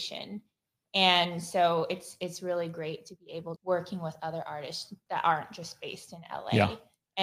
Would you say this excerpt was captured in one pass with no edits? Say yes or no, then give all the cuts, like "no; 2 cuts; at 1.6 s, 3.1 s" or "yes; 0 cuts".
no; 2 cuts; at 3.6 s, 5.1 s